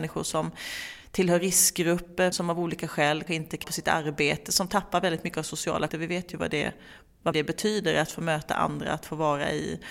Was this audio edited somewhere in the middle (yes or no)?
yes